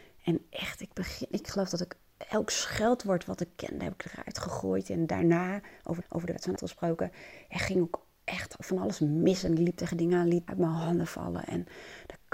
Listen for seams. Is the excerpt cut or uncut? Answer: cut